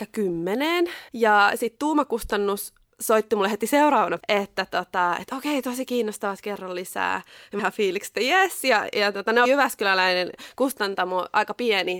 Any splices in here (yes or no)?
yes